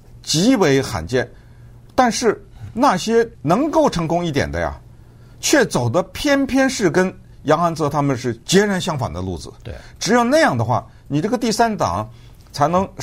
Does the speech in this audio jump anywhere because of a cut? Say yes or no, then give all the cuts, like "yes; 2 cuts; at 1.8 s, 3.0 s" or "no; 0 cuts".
yes; 1 cut; at 3.3 s